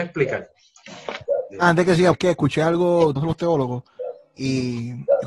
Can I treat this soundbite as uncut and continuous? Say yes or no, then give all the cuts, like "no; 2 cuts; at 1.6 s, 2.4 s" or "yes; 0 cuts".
no; 3 cuts; at 2.1 s, 3.2 s, 4.4 s